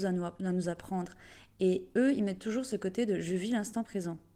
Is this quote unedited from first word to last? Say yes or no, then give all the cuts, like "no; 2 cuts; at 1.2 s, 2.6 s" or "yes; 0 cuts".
yes; 0 cuts